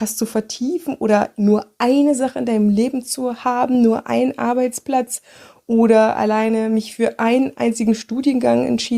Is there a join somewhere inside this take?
no; 0 cuts

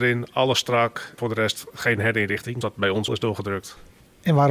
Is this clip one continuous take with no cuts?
no; 3 cuts; at 1.2 s, 2.6 s, 3.1 s

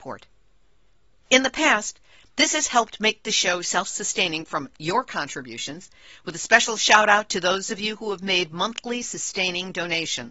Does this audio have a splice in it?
no; 0 cuts

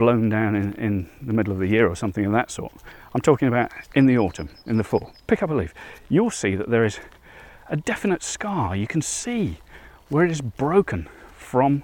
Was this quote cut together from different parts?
no; 0 cuts

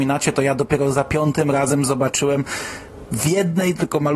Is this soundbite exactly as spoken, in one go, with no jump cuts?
yes; 0 cuts

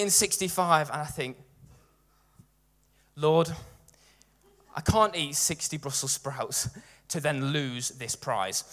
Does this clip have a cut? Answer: no; 0 cuts

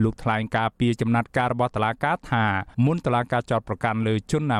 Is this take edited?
yes; 1 cut; at 2.7 s

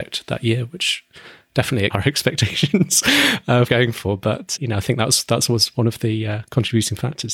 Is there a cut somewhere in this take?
yes; 3 cuts; at 1.9 s, 3.7 s, 4.6 s

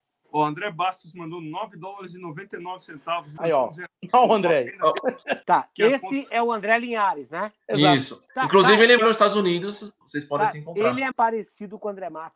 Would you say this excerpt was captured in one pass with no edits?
no; 6 cuts; at 3.4 s, 5.4 s, 8.3 s, 9.0 s, 10.0 s, 11.1 s

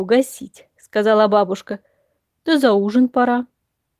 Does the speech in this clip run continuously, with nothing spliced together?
yes; 0 cuts

